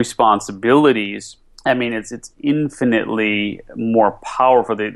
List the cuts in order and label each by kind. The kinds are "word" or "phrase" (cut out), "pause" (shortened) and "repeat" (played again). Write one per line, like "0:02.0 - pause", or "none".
0:01.5 - pause

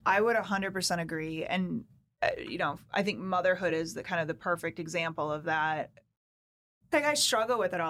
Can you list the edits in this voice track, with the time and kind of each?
none

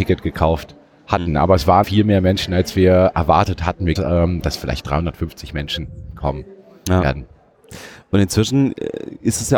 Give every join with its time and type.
0:01.8 - word
0:04.0 - phrase

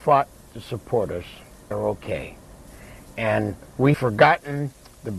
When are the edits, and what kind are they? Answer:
0:01.7 - word
0:03.9 - word

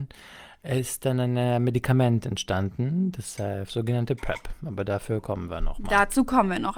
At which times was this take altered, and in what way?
none

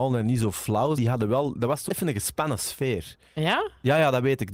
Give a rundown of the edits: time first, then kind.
0:01.0 - word
0:01.9 - word

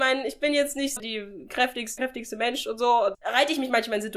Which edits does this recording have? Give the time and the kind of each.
0:01.0 - word
0:02.0 - word
0:03.1 - word

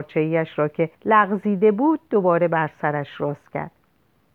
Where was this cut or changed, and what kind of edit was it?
0:00.9 - pause

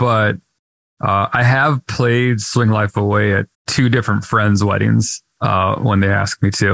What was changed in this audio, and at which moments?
0:03.5 - pause

